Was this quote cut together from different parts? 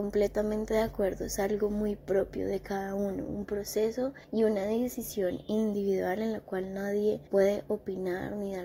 yes; 2 cuts; at 4.2 s, 7.3 s

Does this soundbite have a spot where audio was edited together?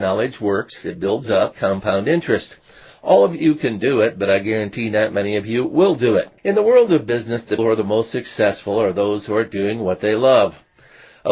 yes; 3 cuts; at 1.5 s, 6.4 s, 7.6 s

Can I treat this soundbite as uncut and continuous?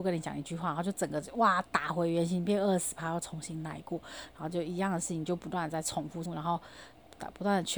no; 1 cut; at 6.3 s

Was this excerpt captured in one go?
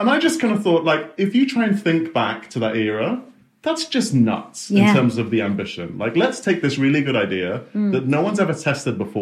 yes; 0 cuts

